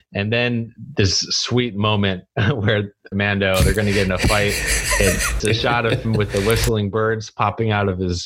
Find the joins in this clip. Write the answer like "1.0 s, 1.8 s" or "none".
3.1 s, 5.4 s, 6.0 s